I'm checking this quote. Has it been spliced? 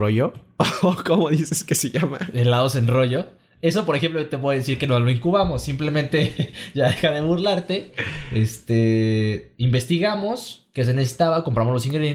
yes; 1 cut; at 9.5 s

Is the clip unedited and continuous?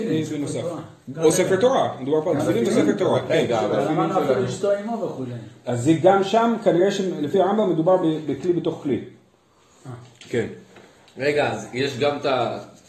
yes; 0 cuts

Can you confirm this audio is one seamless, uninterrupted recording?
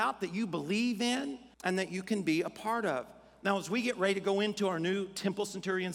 no; 1 cut; at 1.5 s

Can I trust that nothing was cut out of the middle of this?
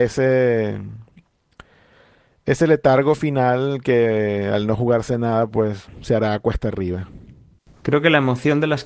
yes; 0 cuts

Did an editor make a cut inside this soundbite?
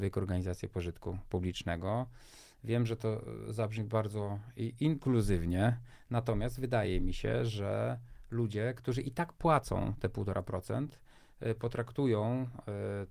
no; 0 cuts

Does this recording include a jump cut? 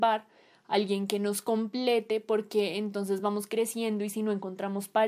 no; 0 cuts

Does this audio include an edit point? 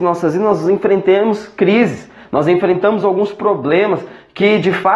no; 0 cuts

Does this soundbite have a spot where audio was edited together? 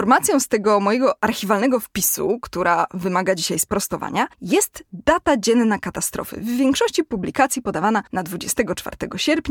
yes; 2 cuts; at 4.3 s, 8.1 s

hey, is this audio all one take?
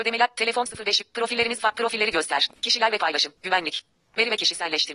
no; 1 cut; at 3.4 s

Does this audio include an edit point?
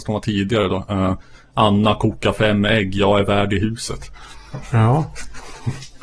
no; 0 cuts

